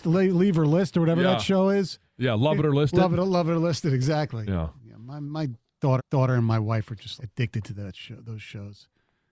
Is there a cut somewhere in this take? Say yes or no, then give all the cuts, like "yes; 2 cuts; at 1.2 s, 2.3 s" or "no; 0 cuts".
yes; 3 cuts; at 4.8 s, 6.0 s, 7.2 s